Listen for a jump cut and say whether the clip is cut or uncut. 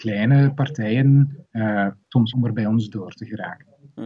cut